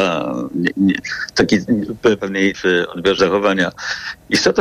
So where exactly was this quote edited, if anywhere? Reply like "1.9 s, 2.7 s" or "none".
2.2 s, 2.5 s, 3.2 s